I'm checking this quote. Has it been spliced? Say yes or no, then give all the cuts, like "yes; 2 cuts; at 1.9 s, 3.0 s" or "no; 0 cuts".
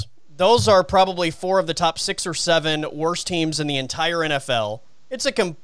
no; 0 cuts